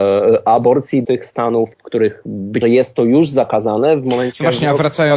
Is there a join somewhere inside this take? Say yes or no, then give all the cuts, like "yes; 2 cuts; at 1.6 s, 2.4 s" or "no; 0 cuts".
yes; 3 cuts; at 1.0 s, 1.7 s, 2.6 s